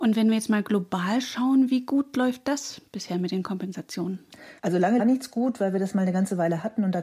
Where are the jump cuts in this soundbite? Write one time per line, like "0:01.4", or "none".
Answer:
0:04.6
0:05.0